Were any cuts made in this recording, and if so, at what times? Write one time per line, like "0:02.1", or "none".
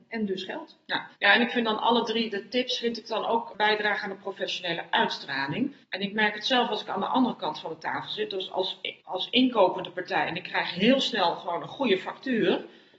0:01.1
0:05.8
0:09.0